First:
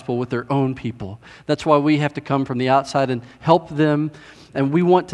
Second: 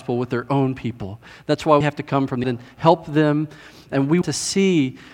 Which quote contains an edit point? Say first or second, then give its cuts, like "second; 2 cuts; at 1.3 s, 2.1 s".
second; 3 cuts; at 1.8 s, 2.4 s, 4.2 s